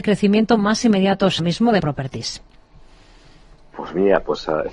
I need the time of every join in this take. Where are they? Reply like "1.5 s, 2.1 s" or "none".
1.4 s, 1.8 s